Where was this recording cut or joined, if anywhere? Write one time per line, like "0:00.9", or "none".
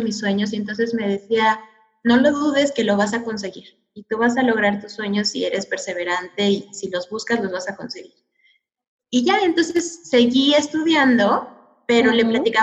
none

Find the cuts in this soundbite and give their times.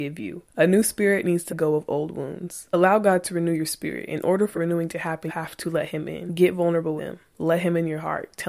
0:01.5
0:04.5
0:05.3
0:07.0

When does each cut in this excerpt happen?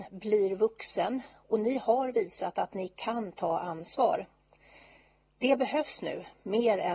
none

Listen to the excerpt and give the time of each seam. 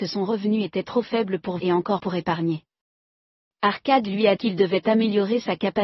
0:01.6
0:02.0
0:04.4

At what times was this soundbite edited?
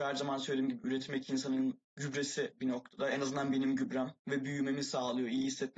0:01.9
0:04.2

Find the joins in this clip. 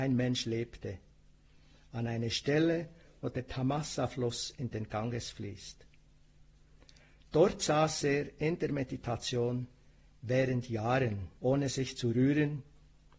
0:11.4

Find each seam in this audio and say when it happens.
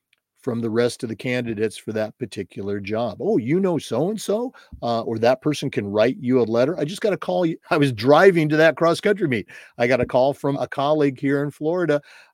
0:07.6
0:10.5

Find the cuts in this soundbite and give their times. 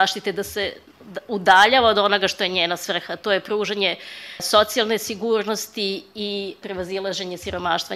none

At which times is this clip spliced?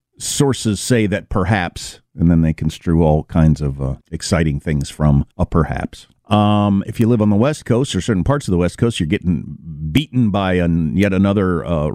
0:04.0
0:05.3
0:06.2

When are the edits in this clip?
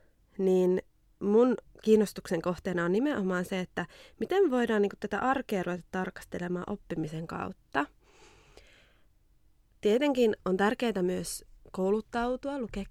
none

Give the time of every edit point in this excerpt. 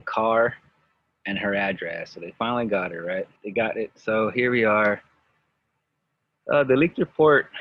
0:03.4

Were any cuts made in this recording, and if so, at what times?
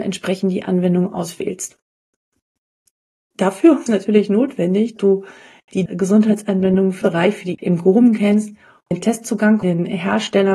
0:03.9
0:05.0
0:05.9
0:07.0
0:07.5
0:08.9
0:09.6

